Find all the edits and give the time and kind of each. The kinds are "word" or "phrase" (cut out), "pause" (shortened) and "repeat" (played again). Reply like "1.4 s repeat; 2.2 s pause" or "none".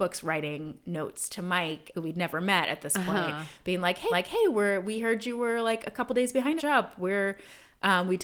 1.9 s phrase; 4.1 s repeat; 6.6 s phrase

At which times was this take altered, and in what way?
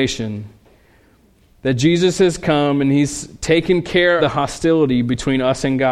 4.2 s word

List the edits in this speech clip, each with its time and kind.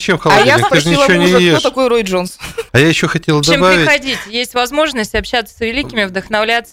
2.7 s pause

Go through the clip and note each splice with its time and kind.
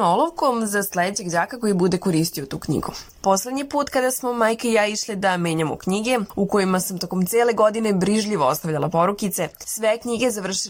none

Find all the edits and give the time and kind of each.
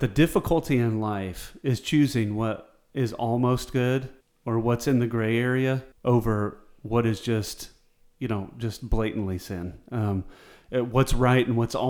4.2 s pause; 5.9 s pause

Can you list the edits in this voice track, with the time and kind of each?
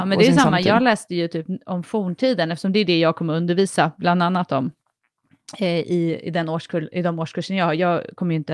none

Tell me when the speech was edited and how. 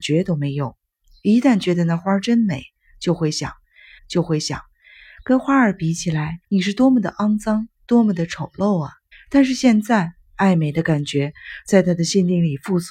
4.0 s repeat; 6.4 s pause; 9.1 s pause

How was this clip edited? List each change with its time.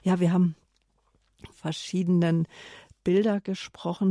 1.5 s phrase

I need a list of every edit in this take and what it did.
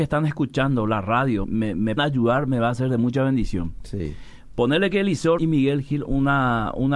1.4 s word; 2.0 s word; 5.4 s word; 6.1 s word

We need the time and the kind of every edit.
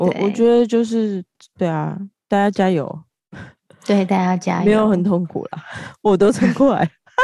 none

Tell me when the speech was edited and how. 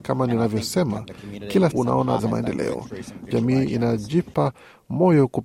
1.7 s word; 2.2 s word; 3.3 s word

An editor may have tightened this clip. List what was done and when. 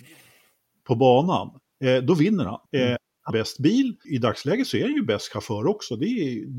1.6 s pause; 2.7 s pause; 3.3 s word; 4.0 s phrase

